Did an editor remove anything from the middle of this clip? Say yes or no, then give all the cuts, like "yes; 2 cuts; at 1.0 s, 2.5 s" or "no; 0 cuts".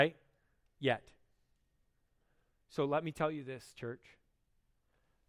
no; 0 cuts